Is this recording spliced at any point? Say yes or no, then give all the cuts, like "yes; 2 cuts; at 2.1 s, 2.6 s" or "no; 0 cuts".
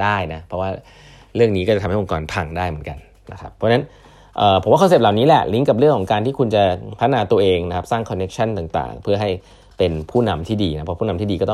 no; 0 cuts